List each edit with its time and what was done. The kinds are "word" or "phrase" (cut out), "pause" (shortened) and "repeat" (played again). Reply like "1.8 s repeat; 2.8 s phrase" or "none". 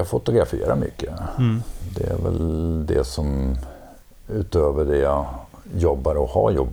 none